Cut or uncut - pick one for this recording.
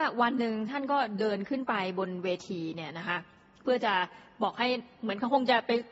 uncut